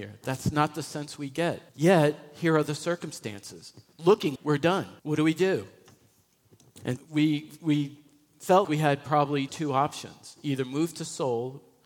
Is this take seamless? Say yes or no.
no